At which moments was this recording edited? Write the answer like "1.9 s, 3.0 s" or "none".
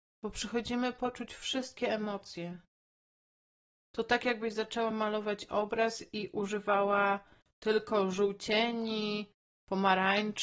none